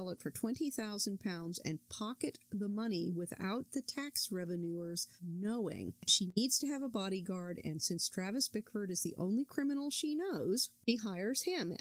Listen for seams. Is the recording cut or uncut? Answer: uncut